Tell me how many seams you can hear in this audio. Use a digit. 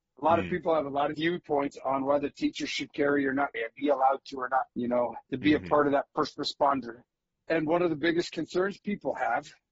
5